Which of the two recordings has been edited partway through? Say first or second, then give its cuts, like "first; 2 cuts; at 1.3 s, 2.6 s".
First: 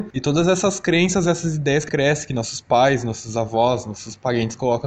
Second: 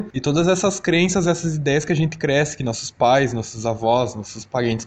first; 1 cut; at 1.9 s